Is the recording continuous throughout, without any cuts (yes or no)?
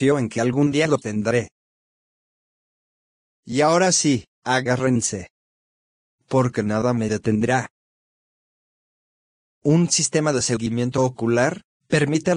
yes